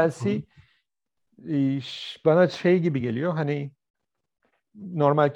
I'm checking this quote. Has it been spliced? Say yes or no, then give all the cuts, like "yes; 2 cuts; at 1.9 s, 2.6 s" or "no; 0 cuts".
no; 0 cuts